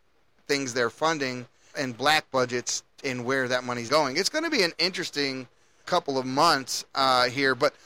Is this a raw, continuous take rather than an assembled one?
no; 3 cuts; at 1.7 s, 3.9 s, 5.8 s

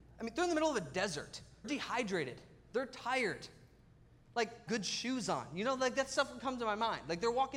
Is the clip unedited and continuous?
no; 2 cuts; at 1.6 s, 4.7 s

